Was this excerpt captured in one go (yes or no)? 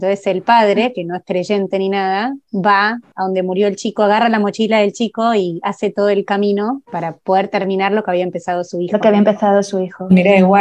no